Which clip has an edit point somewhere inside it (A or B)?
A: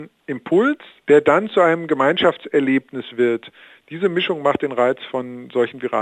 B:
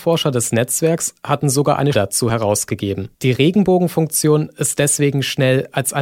B